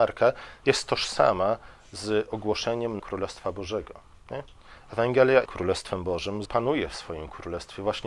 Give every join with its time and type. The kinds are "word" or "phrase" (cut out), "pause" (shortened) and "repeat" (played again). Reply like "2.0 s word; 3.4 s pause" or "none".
3.0 s word; 5.5 s word; 6.5 s phrase